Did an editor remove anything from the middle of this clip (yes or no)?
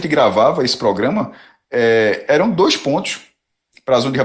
no